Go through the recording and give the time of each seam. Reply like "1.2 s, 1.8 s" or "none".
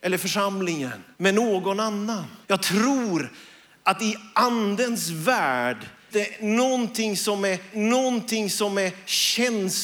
1.1 s, 2.4 s, 6.1 s, 7.7 s